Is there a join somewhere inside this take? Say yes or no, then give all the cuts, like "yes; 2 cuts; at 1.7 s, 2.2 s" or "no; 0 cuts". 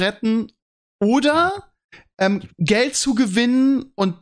no; 0 cuts